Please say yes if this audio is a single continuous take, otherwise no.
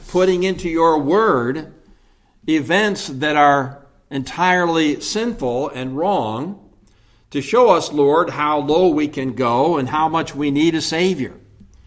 yes